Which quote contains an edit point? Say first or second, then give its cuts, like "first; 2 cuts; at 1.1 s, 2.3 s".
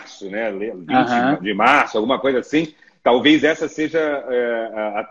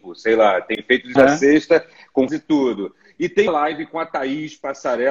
second; 3 cuts; at 1.2 s, 2.3 s, 3.5 s